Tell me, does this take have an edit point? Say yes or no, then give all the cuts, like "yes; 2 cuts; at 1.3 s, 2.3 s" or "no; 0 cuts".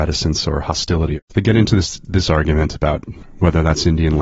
yes; 1 cut; at 1.2 s